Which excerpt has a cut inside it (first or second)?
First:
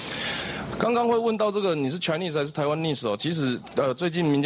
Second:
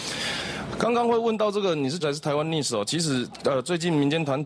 second